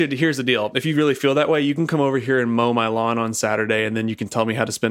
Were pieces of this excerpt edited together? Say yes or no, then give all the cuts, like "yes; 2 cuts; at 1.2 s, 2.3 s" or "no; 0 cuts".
no; 0 cuts